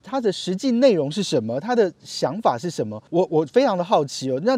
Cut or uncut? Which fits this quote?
cut